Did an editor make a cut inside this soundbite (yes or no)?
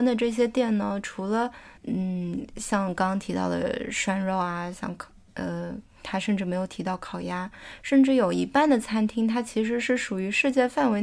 yes